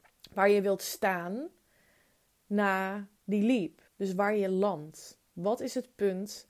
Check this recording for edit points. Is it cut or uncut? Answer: cut